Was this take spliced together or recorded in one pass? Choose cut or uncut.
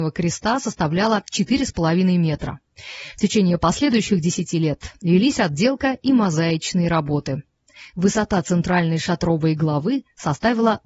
uncut